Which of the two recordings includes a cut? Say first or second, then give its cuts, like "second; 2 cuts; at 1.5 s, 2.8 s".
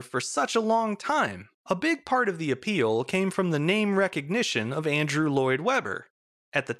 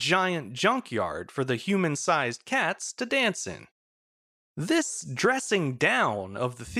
first; 1 cut; at 1.6 s